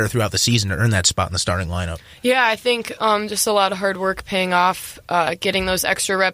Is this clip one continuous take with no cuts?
yes; 0 cuts

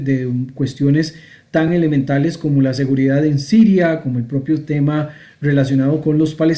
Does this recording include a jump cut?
no; 0 cuts

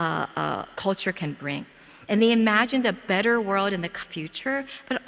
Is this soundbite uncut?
no; 1 cut; at 4.0 s

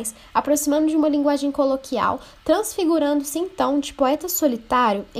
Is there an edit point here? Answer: no; 0 cuts

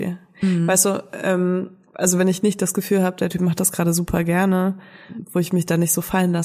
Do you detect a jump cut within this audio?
no; 0 cuts

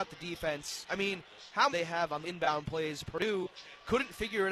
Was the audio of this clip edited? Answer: yes; 2 cuts; at 1.7 s, 2.2 s

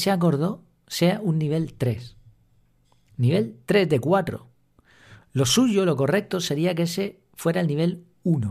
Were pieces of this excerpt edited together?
no; 0 cuts

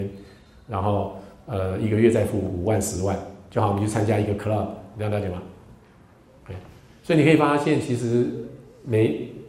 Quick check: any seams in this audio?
no; 0 cuts

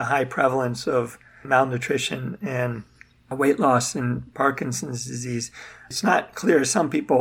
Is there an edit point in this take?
no; 0 cuts

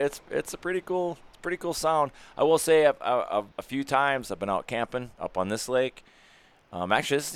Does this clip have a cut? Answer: yes; 2 cuts; at 1.3 s, 3.5 s

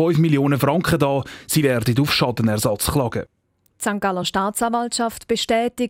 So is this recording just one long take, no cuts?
yes; 0 cuts

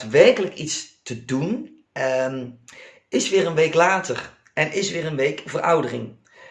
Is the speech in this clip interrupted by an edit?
yes; 1 cut; at 1.9 s

